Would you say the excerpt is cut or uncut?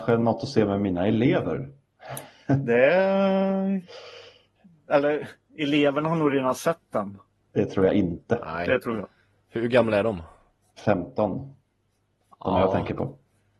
uncut